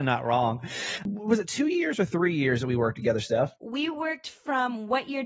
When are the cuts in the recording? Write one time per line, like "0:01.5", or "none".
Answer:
0:03.6